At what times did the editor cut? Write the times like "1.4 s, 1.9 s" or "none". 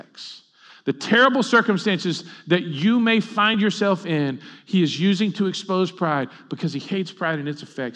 none